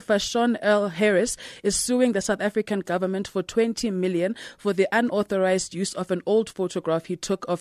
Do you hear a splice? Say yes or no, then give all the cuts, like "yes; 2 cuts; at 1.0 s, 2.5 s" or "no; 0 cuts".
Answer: no; 0 cuts